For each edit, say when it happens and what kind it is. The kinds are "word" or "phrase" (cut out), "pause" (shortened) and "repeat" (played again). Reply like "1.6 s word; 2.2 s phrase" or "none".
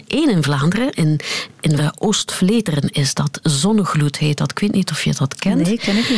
0.9 s word; 1.8 s phrase

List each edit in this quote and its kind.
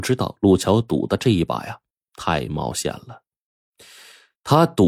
none

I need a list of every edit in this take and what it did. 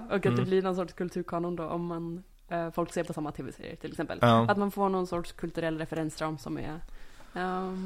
2.3 s pause

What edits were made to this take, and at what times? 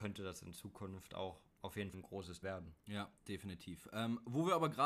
1.5 s pause; 1.9 s word; 2.4 s word; 3.2 s pause

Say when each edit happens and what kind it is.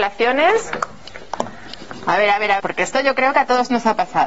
2.6 s word

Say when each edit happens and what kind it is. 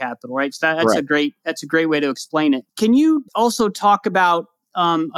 2.7 s pause; 3.3 s pause

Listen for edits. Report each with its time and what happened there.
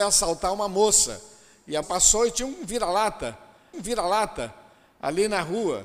1.8 s word; 3.7 s repeat

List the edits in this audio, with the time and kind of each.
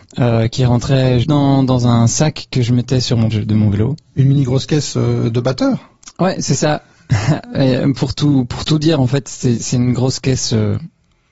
1.2 s word; 3.3 s word

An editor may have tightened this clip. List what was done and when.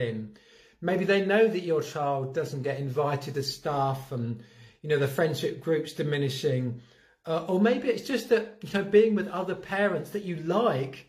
none

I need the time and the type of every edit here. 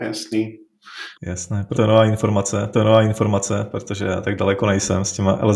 1.1 s pause; 1.7 s word; 2.7 s repeat

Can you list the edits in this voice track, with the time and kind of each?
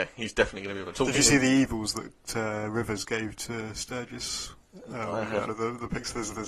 5.5 s phrase

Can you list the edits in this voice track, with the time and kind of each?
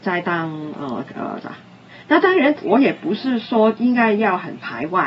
1.4 s word

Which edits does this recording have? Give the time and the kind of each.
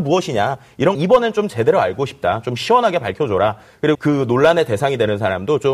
0.9 s word; 3.9 s word

